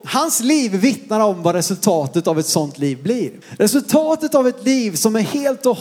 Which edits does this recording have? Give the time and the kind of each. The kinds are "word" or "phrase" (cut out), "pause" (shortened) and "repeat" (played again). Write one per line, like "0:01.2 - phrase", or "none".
0:03.4 - pause